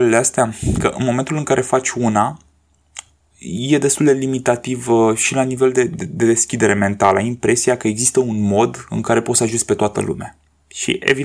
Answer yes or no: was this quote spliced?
no